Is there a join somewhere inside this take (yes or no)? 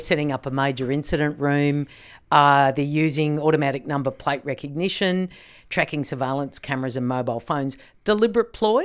no